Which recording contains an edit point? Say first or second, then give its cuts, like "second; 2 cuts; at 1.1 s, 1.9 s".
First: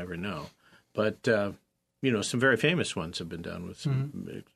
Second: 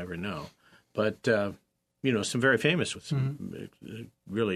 second; 1 cut; at 2.9 s